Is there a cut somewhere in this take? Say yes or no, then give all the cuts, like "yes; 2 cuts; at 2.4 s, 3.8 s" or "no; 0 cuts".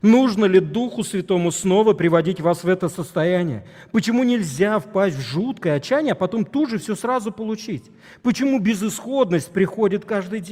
no; 0 cuts